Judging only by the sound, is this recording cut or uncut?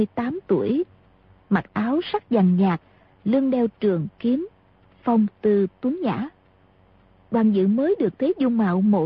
uncut